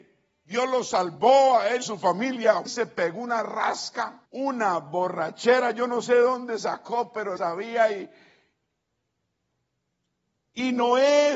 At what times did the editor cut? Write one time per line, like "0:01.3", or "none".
0:01.8
0:02.7
0:04.3
0:07.4